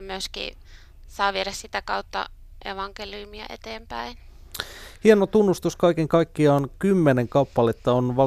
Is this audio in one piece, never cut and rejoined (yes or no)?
no